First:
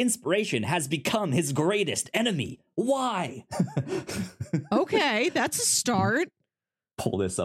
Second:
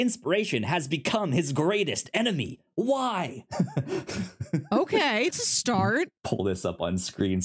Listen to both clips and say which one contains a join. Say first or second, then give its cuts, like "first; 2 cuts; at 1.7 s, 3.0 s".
second; 2 cuts; at 5.3 s, 6.2 s